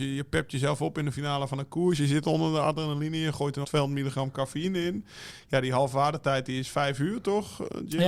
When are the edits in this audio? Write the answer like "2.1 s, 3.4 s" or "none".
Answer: 3.6 s